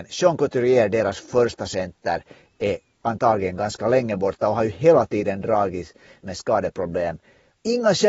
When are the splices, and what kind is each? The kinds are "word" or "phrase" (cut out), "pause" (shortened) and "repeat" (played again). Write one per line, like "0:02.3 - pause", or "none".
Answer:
none